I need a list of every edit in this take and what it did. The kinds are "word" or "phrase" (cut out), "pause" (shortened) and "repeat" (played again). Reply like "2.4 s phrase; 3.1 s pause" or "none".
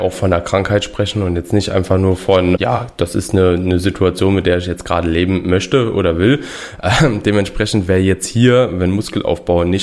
2.6 s word